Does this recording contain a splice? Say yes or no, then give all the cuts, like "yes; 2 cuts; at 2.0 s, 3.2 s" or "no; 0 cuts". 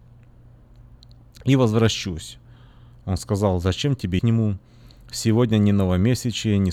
yes; 1 cut; at 4.2 s